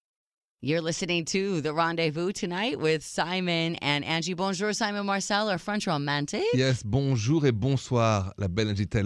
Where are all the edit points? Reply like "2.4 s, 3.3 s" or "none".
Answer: none